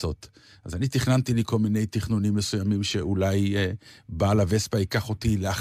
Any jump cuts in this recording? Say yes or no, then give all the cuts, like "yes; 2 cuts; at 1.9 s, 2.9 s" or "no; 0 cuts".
no; 0 cuts